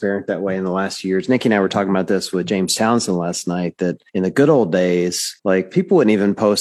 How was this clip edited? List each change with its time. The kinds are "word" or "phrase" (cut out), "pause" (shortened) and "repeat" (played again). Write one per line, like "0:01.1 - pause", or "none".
0:04.1 - pause
0:05.4 - pause